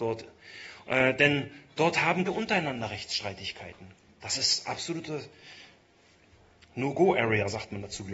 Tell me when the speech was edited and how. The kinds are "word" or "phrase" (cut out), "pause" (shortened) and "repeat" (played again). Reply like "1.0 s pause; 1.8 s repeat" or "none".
2.3 s word; 4.0 s pause